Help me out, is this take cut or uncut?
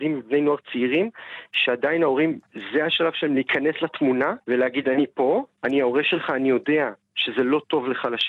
cut